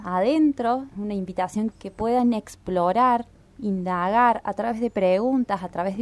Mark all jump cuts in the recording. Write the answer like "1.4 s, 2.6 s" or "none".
0.9 s, 1.7 s